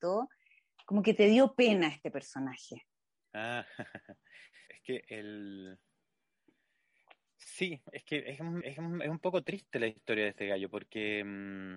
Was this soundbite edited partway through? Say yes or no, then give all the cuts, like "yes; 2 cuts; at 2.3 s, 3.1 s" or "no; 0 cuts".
yes; 2 cuts; at 4.7 s, 8.6 s